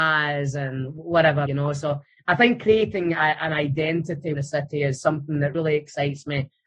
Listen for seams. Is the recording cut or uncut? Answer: cut